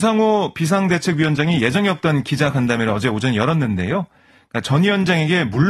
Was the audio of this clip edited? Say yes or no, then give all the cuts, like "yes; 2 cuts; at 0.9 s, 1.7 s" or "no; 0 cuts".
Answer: no; 0 cuts